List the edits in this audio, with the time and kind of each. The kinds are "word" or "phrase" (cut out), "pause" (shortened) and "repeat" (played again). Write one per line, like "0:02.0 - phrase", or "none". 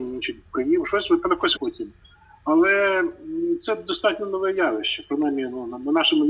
0:01.6 - word